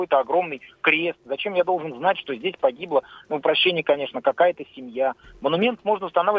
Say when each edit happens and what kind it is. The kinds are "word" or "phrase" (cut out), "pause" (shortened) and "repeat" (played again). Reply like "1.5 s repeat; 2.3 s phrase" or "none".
3.4 s word